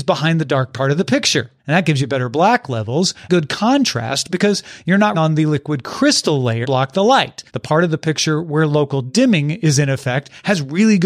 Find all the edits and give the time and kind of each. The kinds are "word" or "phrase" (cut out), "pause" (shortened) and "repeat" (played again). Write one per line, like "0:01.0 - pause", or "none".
0:01.6 - pause
0:03.3 - word
0:05.1 - word
0:06.6 - word
0:07.5 - pause